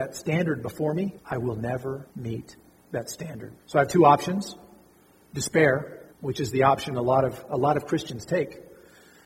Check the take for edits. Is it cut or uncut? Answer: cut